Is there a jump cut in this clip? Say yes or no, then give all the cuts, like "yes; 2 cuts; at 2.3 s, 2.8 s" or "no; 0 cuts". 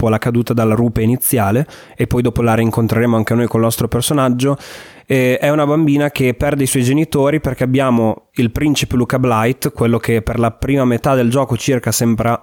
no; 0 cuts